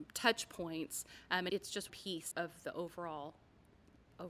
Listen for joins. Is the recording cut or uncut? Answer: cut